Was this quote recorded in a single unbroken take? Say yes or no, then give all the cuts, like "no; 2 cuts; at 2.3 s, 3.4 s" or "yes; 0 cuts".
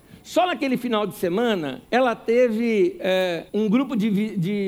no; 2 cuts; at 1.8 s, 3.5 s